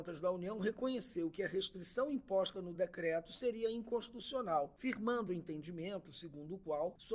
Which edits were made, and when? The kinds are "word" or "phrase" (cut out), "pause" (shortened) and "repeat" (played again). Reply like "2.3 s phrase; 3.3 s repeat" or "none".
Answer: none